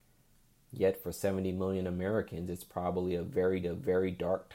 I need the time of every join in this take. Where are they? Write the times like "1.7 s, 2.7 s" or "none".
3.6 s